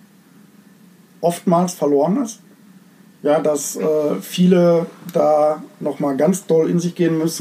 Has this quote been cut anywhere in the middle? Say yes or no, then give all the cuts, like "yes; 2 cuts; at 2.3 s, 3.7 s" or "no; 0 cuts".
no; 0 cuts